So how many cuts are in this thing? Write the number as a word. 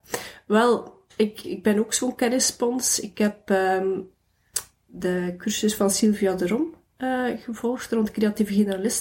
one